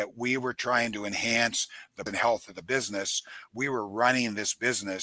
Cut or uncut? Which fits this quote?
cut